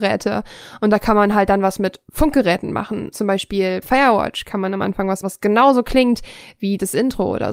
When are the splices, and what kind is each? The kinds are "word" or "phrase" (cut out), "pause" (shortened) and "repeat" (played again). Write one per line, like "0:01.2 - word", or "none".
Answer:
0:03.1 - word
0:03.8 - word
0:05.2 - word